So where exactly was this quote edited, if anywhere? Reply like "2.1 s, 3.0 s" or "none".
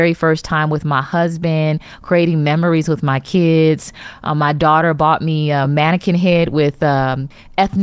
none